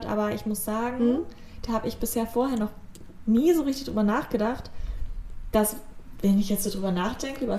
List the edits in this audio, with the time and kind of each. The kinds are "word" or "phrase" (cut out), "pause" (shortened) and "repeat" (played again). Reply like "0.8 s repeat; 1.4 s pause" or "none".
none